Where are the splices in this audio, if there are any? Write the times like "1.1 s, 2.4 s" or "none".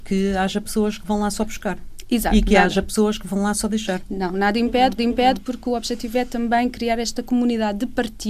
5.0 s